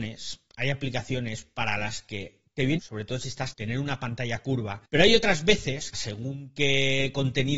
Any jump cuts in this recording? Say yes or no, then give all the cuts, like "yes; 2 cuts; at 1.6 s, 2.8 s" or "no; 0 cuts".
yes; 4 cuts; at 2.8 s, 3.5 s, 4.9 s, 5.9 s